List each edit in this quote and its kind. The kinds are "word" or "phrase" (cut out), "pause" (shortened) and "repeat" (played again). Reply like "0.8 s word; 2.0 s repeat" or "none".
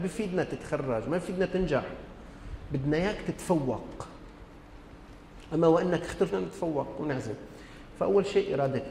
6.3 s phrase